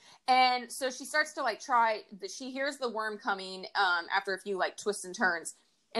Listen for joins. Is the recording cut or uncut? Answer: uncut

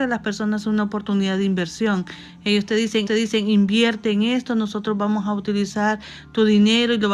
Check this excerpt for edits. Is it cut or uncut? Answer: cut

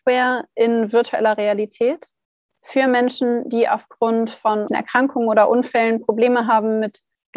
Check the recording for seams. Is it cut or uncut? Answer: cut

